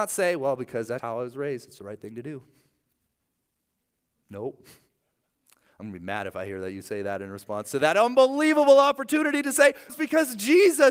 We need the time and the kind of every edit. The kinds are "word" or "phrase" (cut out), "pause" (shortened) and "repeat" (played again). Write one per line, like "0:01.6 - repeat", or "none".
0:01.0 - word
0:01.8 - word
0:09.9 - word